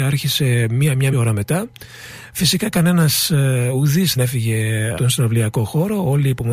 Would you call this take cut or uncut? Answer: cut